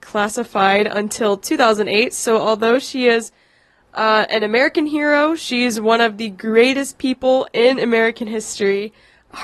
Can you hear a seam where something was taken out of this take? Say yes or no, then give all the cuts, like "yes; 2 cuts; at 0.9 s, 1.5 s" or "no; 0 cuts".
no; 0 cuts